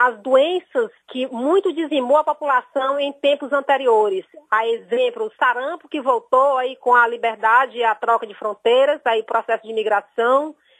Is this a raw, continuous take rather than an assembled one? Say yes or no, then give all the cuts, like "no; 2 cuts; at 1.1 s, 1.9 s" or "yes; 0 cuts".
no; 1 cut; at 1.0 s